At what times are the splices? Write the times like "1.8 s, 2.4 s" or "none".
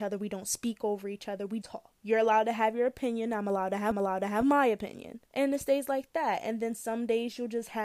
1.6 s, 2.0 s, 3.9 s, 5.2 s